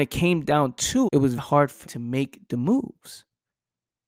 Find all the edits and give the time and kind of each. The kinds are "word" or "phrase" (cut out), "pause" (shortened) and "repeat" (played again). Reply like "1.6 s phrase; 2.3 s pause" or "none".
1.0 s word; 1.4 s word; 1.8 s word